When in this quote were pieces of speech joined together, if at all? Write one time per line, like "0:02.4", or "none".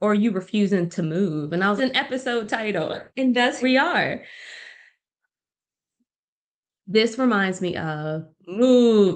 0:01.8
0:03.1
0:03.6